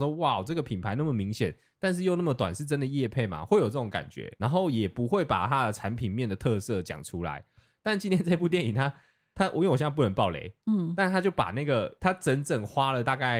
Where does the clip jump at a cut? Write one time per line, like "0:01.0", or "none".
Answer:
none